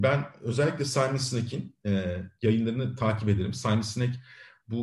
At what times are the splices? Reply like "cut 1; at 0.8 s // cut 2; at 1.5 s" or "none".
none